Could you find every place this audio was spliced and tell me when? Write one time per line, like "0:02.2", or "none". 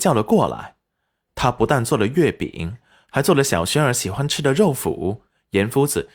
none